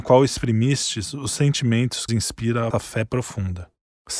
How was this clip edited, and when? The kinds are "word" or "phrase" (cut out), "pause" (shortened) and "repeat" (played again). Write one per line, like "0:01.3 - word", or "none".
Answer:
0:02.1 - phrase
0:02.7 - word

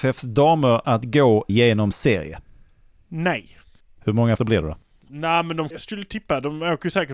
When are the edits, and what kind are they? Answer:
0:01.5 - word
0:01.9 - word
0:04.4 - word
0:05.7 - word

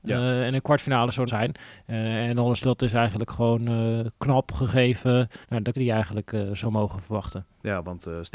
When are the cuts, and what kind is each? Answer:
0:01.3 - word
0:02.6 - word
0:05.4 - pause
0:05.7 - word

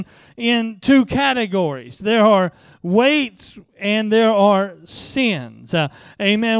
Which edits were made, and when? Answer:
none

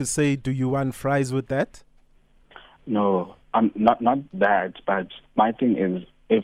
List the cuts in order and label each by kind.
0:03.4 - pause
0:04.3 - pause
0:05.2 - pause

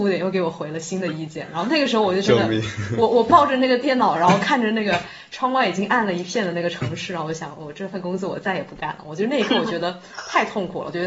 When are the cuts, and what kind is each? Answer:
none

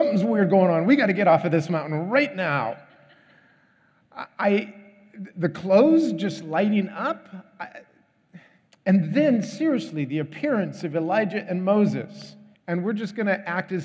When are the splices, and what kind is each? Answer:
0:08.7 - pause
0:12.5 - pause

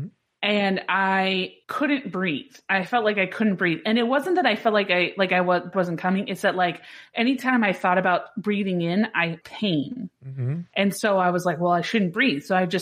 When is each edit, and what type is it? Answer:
0:01.6 - pause
0:05.7 - word
0:09.4 - word
0:10.7 - pause

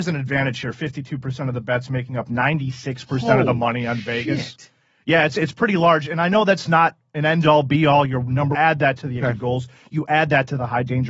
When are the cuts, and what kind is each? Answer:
0:08.5 - phrase
0:09.2 - word

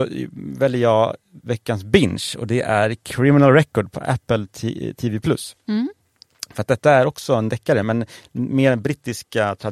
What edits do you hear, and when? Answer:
none

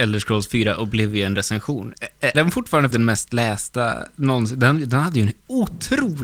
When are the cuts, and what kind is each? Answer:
0:02.3 - word
0:02.9 - phrase

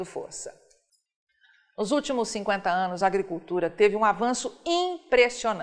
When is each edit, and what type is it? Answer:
none

